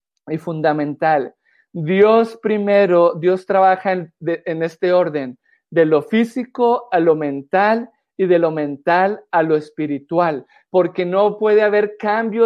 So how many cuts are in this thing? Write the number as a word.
zero